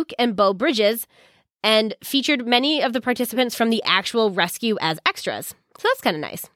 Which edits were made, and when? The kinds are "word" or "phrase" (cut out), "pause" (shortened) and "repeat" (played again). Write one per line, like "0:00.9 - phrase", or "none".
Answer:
none